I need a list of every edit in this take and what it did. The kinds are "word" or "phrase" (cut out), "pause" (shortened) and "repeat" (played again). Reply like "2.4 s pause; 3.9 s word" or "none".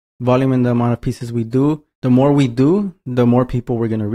1.9 s pause